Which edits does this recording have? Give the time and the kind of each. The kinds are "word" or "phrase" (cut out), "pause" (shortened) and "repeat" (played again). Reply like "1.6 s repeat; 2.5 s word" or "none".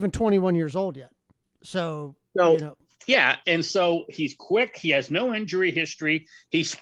none